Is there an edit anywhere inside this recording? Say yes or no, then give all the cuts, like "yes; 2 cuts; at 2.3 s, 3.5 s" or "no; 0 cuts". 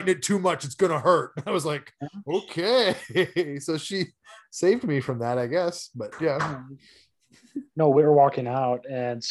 no; 0 cuts